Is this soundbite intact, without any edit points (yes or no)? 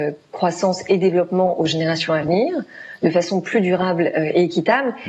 yes